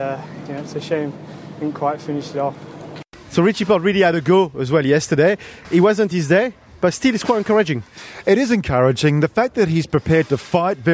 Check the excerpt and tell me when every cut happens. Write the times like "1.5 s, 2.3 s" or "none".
none